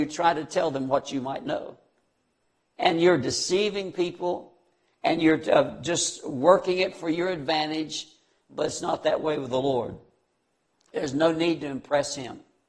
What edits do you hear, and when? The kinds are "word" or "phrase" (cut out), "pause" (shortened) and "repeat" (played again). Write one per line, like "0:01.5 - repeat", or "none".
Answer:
none